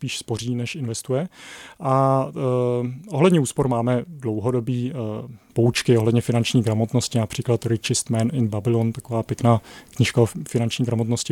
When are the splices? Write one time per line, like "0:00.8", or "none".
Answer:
none